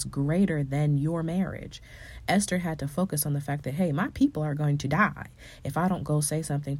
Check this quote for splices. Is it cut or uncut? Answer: uncut